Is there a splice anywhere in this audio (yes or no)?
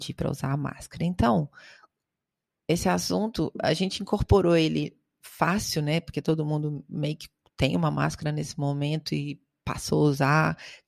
no